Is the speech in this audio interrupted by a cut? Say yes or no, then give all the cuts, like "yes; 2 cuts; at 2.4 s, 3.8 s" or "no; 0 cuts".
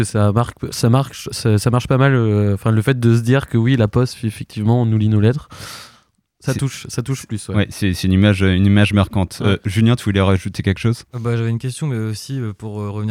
no; 0 cuts